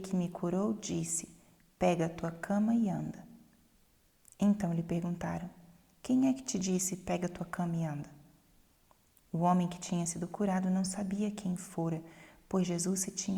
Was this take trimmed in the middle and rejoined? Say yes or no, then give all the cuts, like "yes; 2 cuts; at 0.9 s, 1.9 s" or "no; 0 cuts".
no; 0 cuts